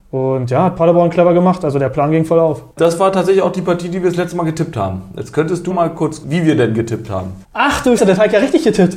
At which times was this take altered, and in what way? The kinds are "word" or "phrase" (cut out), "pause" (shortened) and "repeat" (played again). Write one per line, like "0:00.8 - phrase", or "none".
0:02.7 - pause
0:05.7 - word
0:06.2 - word
0:07.4 - pause
0:08.0 - word